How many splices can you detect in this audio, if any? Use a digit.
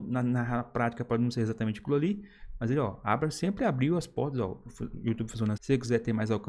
1